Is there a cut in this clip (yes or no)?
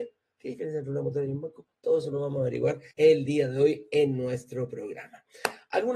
yes